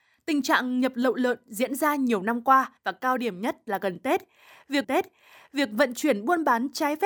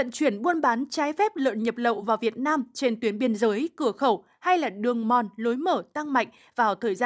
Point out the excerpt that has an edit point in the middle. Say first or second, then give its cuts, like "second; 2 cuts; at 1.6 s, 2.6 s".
first; 2 cuts; at 2.8 s, 4.8 s